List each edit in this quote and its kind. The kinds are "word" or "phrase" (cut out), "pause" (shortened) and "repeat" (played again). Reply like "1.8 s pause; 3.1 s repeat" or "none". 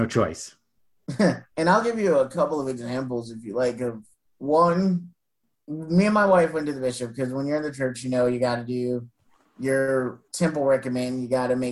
1.5 s pause; 10.3 s pause